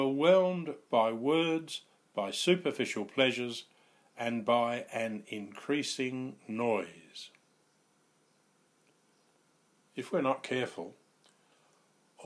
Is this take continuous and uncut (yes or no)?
yes